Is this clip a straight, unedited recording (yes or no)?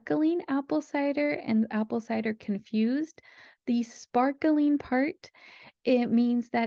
yes